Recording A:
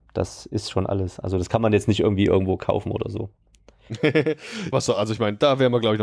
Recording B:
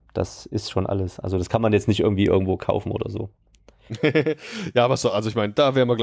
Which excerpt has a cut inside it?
A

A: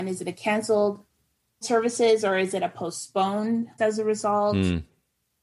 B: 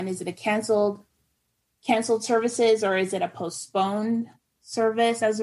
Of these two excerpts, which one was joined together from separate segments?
A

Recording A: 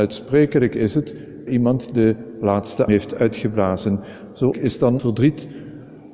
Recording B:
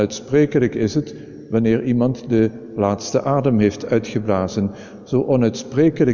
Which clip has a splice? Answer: A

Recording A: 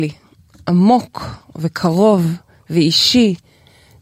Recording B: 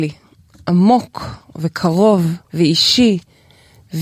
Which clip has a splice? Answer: B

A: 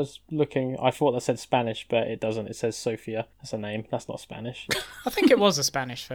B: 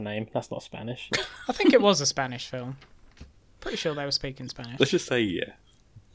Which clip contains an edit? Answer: A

